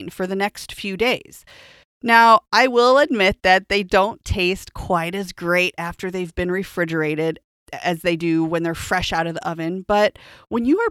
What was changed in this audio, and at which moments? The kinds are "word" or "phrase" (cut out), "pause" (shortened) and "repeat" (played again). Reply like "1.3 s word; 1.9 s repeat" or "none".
none